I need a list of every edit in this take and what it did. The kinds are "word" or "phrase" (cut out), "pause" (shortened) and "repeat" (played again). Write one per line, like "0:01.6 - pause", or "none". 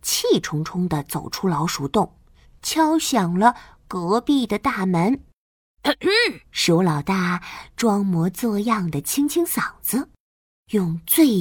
0:06.4 - pause